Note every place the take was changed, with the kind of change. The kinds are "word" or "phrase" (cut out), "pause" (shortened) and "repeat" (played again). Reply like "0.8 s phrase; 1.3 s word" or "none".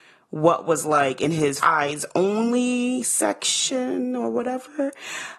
1.6 s phrase